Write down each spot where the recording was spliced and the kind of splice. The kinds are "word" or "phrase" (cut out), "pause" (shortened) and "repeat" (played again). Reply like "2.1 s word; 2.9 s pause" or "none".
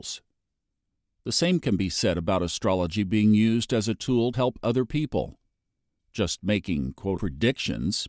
4.3 s word; 7.2 s word

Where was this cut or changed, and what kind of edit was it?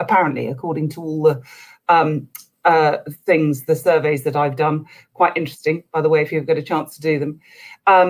none

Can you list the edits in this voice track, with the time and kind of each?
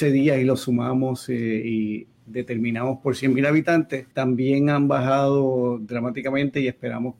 4.1 s pause

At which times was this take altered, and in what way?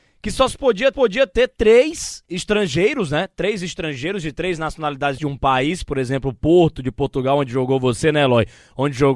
0.9 s repeat; 5.2 s word

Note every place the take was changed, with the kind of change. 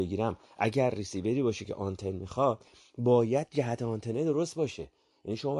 none

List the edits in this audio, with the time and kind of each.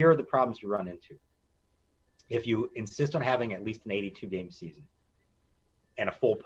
none

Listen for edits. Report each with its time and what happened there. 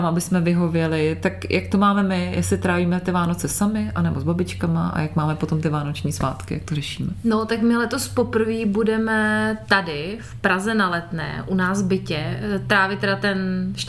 none

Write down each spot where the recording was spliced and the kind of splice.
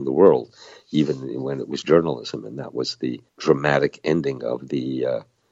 1.8 s word; 3.3 s pause

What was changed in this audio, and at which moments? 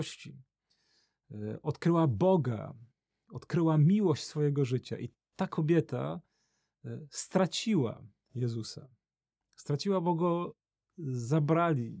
none

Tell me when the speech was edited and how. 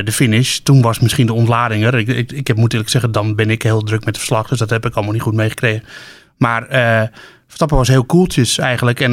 none

